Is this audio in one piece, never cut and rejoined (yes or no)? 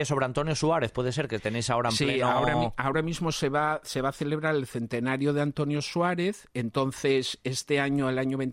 yes